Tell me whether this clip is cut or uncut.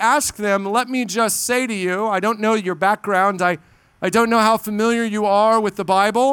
uncut